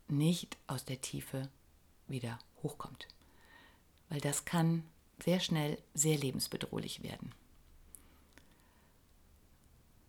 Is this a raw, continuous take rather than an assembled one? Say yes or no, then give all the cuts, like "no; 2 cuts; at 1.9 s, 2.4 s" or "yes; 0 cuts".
no; 1 cut; at 5.9 s